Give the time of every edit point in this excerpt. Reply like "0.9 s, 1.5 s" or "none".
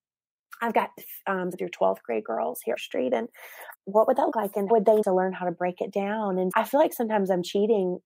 1.5 s, 2.8 s, 3.7 s, 4.3 s, 4.7 s, 5.0 s, 6.5 s